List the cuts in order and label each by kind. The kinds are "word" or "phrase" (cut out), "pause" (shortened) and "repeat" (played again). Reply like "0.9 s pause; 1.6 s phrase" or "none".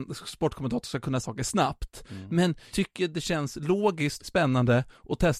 1.2 s word; 2.7 s word; 4.2 s word